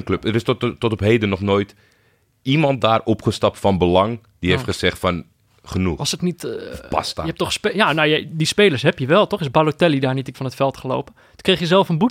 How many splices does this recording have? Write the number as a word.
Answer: two